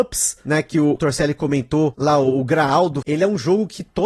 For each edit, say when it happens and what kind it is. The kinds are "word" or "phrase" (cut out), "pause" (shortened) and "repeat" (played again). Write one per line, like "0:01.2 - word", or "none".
0:03.0 - word